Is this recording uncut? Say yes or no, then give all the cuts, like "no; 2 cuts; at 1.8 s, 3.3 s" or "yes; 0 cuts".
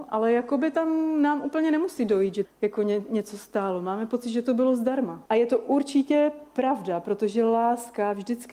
no; 2 cuts; at 2.4 s, 5.3 s